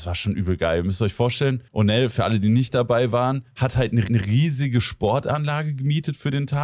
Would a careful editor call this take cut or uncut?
cut